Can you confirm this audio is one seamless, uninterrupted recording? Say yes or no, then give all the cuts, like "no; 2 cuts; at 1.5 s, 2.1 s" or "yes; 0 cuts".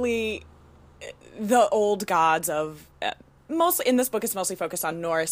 no; 1 cut; at 2.9 s